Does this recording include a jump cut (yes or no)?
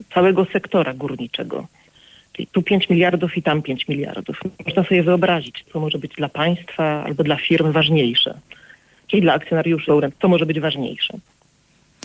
yes